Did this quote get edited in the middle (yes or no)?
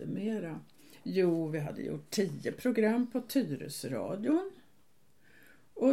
no